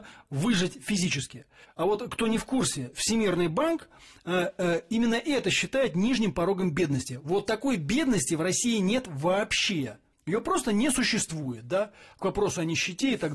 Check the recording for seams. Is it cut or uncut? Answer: uncut